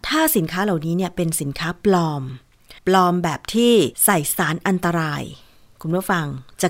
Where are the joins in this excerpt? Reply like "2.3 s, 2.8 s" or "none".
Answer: 2.8 s, 3.9 s